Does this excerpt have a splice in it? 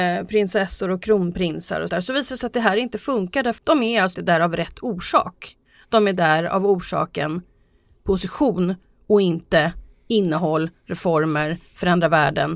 yes; 3 cuts; at 1.9 s, 3.6 s, 4.1 s

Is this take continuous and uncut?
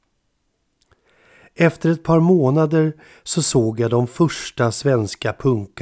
yes; 0 cuts

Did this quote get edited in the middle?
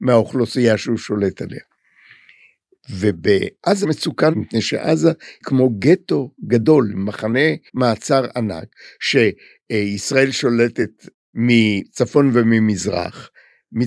yes; 5 cuts; at 3.8 s, 4.3 s, 5.4 s, 6.4 s, 7.7 s

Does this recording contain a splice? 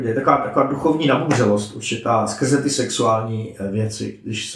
no; 0 cuts

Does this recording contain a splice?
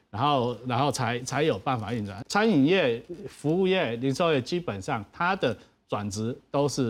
yes; 1 cut; at 2.2 s

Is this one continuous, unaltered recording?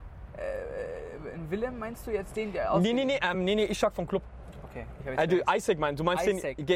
yes; 0 cuts

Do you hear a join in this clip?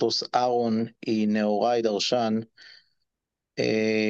no; 0 cuts

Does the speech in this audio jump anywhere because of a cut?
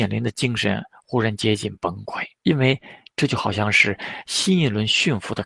yes; 1 cut; at 2.3 s

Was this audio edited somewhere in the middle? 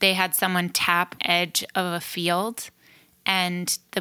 yes; 1 cut; at 1.2 s

